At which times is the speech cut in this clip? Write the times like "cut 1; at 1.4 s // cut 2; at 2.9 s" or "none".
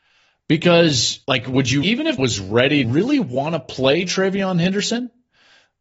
cut 1; at 1.2 s // cut 2; at 1.8 s // cut 3; at 2.2 s // cut 4; at 2.8 s

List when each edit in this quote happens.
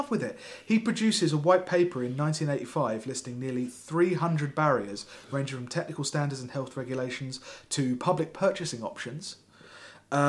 none

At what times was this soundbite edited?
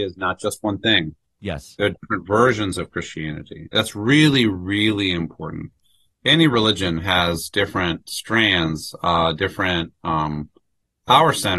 none

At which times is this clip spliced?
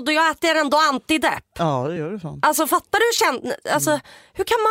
none

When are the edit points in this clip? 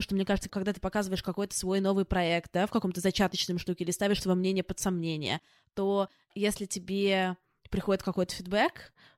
none

